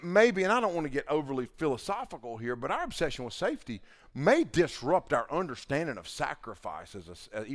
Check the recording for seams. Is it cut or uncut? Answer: uncut